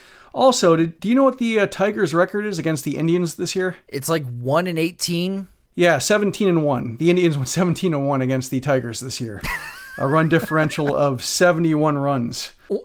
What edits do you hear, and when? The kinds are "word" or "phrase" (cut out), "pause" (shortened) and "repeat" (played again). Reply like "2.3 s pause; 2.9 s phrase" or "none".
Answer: none